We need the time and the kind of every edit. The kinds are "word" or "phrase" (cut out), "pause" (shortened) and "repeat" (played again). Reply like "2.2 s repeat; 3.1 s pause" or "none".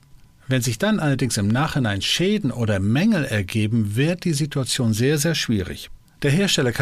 none